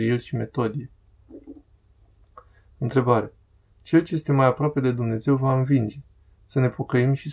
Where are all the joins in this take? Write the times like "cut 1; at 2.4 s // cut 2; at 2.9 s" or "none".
none